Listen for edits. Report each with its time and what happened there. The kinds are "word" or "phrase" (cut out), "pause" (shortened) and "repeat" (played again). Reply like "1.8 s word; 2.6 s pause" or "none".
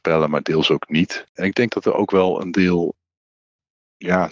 1.3 s pause